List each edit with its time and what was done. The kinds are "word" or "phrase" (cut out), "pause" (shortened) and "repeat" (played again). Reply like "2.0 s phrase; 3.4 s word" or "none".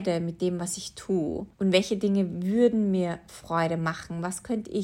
1.5 s pause